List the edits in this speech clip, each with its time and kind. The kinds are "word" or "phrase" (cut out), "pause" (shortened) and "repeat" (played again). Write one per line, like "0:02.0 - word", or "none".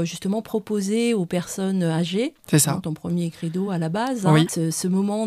none